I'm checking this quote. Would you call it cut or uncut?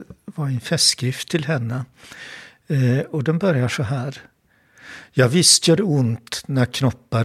uncut